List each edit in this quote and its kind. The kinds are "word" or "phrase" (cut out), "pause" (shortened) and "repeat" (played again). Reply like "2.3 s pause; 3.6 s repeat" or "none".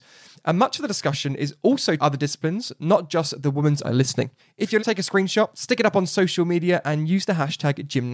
2.0 s phrase; 3.8 s phrase; 4.4 s pause; 4.8 s phrase